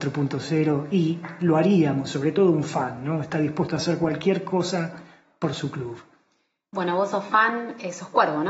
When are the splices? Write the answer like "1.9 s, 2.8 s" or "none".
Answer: none